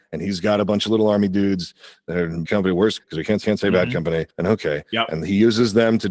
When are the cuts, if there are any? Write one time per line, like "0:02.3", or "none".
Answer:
0:02.5
0:03.0
0:03.4
0:04.3